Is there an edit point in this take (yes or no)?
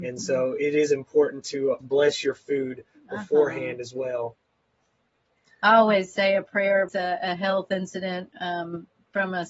yes